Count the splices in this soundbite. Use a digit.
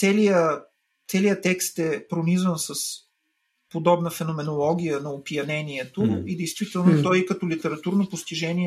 0